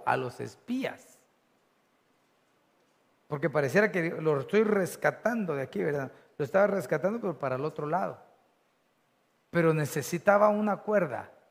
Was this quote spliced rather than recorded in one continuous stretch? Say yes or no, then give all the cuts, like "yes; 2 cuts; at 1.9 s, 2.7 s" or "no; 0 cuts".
no; 0 cuts